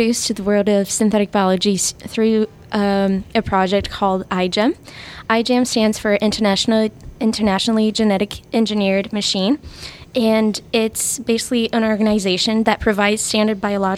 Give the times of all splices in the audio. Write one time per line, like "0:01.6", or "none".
none